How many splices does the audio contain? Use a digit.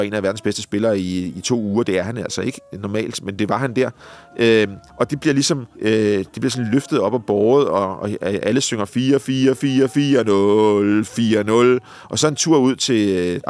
2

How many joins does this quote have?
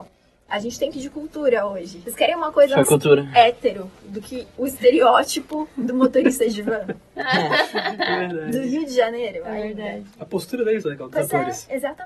4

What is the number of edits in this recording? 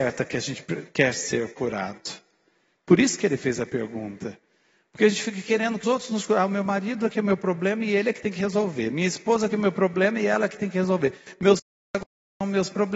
1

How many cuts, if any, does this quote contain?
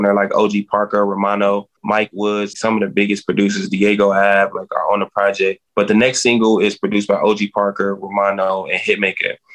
3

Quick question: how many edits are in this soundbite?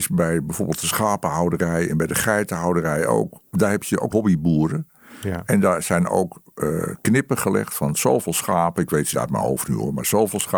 2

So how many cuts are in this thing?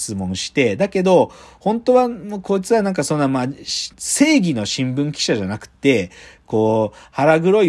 1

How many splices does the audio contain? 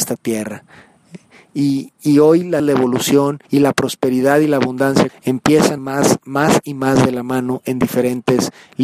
4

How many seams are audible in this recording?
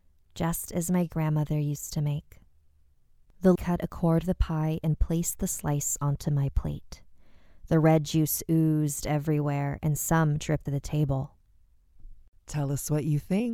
3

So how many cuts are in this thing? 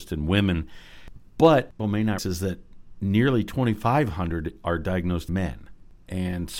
3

